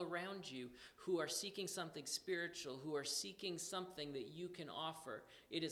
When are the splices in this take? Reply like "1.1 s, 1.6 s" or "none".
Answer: none